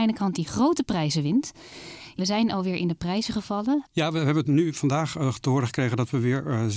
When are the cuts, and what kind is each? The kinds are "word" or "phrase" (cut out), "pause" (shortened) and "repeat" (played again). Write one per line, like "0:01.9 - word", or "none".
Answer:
0:02.2 - phrase
0:04.4 - phrase